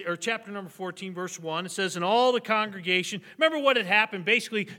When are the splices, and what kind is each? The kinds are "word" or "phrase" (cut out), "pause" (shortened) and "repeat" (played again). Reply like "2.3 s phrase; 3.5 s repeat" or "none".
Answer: none